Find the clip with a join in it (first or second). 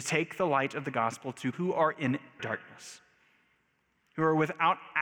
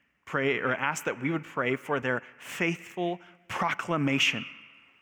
first